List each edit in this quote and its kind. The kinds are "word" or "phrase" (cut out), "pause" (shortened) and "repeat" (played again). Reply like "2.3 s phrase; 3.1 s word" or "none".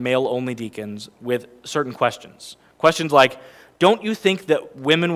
none